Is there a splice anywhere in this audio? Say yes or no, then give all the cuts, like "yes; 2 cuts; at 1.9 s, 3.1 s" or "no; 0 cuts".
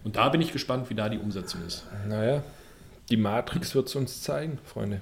no; 0 cuts